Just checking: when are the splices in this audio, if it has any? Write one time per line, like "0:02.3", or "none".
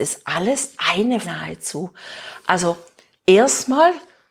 0:01.2